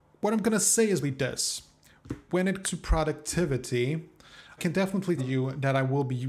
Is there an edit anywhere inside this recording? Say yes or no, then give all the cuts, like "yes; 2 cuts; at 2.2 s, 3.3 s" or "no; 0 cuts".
yes; 4 cuts; at 1.0 s, 2.6 s, 4.6 s, 5.2 s